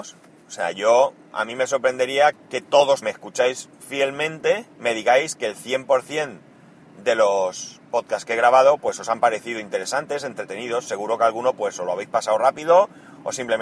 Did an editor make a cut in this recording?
yes; 3 cuts; at 2.3 s, 3.0 s, 4.7 s

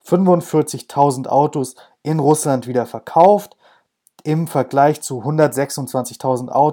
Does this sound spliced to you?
no; 0 cuts

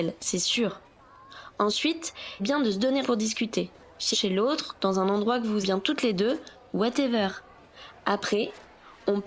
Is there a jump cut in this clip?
yes; 4 cuts; at 2.4 s, 3.0 s, 4.1 s, 5.6 s

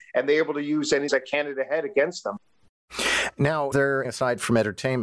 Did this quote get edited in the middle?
yes; 3 cuts; at 1.1 s, 3.7 s, 4.0 s

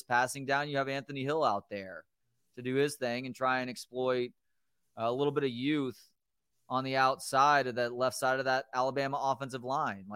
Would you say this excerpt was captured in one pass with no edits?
yes; 0 cuts

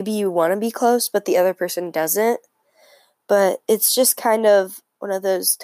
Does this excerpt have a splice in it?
no; 0 cuts

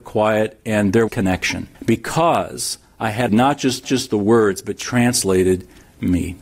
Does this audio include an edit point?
yes; 4 cuts; at 1.1 s, 1.7 s, 3.3 s, 3.8 s

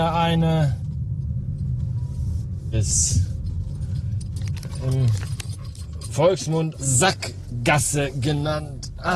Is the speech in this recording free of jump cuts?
no; 2 cuts; at 2.7 s, 6.7 s

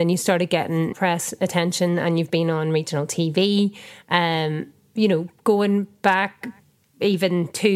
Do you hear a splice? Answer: yes; 1 cut; at 0.9 s

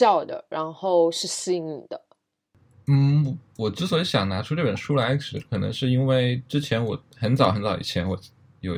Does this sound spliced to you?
no; 0 cuts

